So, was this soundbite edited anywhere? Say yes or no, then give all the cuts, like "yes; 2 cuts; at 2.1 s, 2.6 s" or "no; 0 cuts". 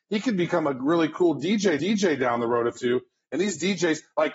yes; 2 cuts; at 1.8 s, 2.8 s